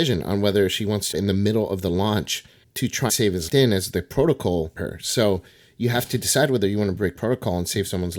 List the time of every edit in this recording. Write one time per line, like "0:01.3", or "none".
0:01.1
0:02.6
0:03.1
0:03.5
0:04.8